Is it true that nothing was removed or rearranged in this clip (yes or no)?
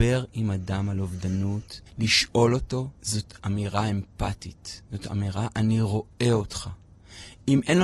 no